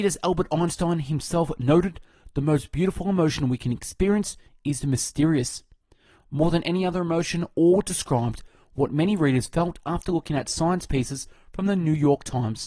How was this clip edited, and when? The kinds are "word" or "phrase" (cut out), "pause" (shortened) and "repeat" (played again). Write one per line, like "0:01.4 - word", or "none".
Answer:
0:05.8 - pause